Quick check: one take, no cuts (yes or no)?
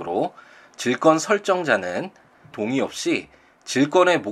no